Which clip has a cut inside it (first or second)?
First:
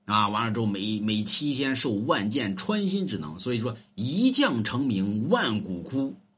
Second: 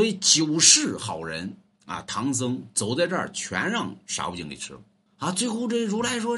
second